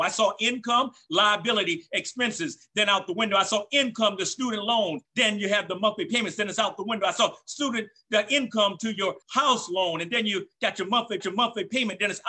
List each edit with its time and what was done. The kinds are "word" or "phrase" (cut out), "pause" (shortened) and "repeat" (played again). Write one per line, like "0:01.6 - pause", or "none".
0:05.0 - pause
0:09.2 - pause
0:11.2 - repeat